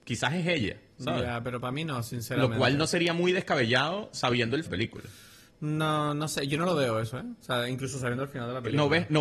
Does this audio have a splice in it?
yes; 1 cut; at 4.7 s

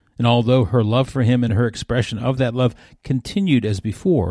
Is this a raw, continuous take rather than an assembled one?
yes; 0 cuts

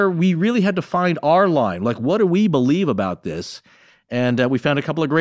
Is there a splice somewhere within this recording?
no; 0 cuts

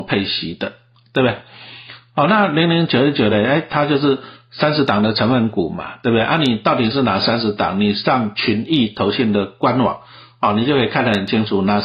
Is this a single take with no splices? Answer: yes; 0 cuts

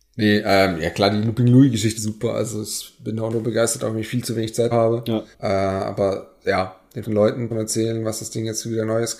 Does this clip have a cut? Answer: yes; 6 cuts; at 2.0 s, 3.3 s, 4.7 s, 5.3 s, 7.0 s, 7.5 s

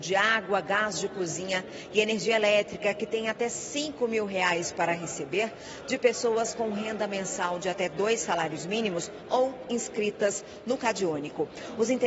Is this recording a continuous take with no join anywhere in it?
yes; 0 cuts

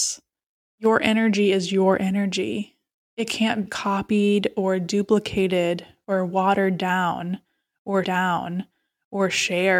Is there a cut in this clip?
yes; 2 cuts; at 3.7 s, 8.0 s

